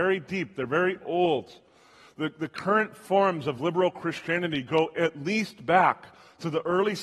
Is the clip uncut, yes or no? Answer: yes